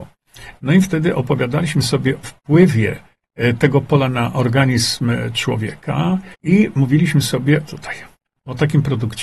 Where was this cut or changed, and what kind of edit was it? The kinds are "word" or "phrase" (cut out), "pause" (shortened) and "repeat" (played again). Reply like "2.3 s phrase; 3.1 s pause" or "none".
2.2 s word; 6.3 s pause; 7.7 s phrase; 8.2 s pause

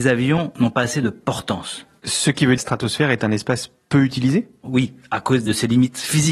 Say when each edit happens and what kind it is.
2.6 s phrase

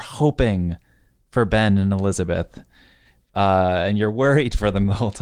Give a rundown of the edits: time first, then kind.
none

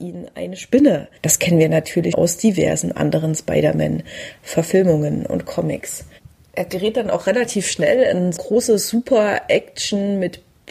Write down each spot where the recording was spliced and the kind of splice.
1.2 s pause; 2.1 s word; 8.4 s word

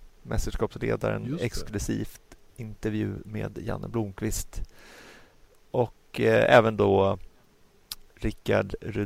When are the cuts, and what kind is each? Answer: none

